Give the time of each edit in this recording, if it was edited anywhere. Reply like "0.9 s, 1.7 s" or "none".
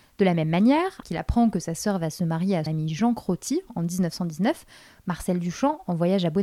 1.0 s, 2.7 s